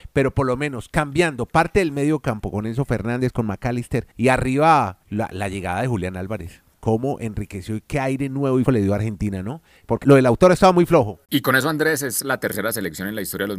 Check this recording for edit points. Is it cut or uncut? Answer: cut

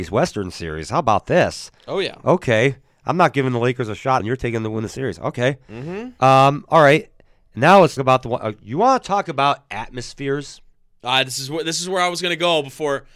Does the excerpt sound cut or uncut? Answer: cut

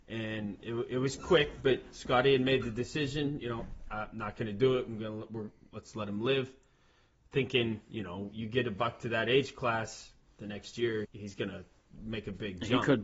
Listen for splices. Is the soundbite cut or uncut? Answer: cut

